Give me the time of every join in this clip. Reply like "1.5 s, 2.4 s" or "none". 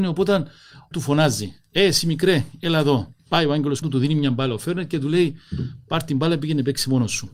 0.9 s, 3.2 s, 3.8 s